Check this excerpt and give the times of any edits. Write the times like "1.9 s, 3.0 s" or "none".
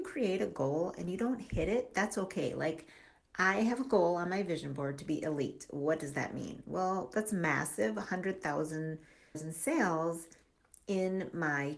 9.3 s